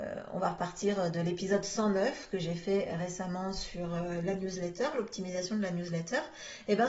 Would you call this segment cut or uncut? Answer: uncut